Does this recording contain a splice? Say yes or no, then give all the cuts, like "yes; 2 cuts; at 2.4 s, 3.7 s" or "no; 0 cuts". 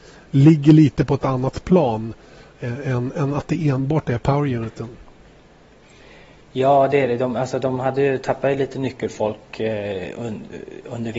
no; 0 cuts